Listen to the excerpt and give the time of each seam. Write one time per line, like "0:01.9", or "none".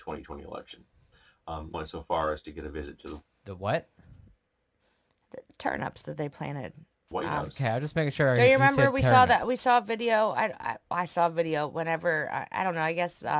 0:01.7